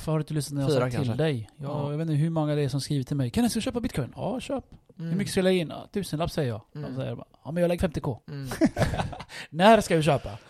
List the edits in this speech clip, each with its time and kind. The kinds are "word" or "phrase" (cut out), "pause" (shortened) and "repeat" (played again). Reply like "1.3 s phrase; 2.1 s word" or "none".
7.8 s word; 8.2 s pause